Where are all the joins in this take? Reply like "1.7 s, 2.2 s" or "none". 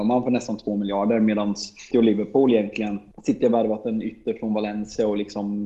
1.9 s, 3.1 s